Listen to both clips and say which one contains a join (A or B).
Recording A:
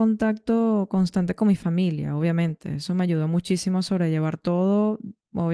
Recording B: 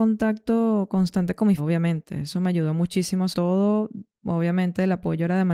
B